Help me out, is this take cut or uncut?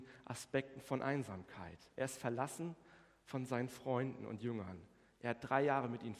uncut